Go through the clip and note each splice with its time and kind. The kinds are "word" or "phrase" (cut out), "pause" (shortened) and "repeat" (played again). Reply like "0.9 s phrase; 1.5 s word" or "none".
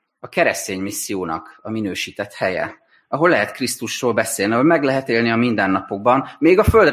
none